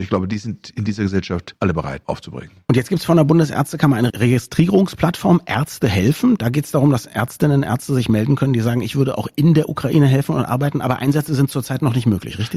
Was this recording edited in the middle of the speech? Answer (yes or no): no